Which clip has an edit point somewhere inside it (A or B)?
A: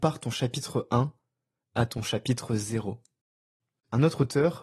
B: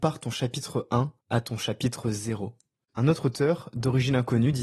B